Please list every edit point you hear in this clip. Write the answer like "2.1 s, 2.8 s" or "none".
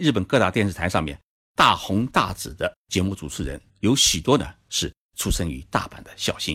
3.7 s